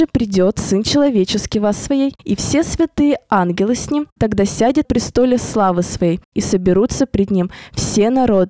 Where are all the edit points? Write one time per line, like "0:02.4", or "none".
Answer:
0:01.7
0:04.8